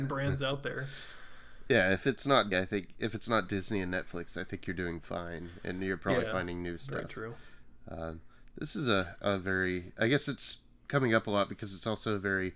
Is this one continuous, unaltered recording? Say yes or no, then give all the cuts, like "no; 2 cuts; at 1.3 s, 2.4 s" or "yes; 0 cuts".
no; 1 cut; at 2.5 s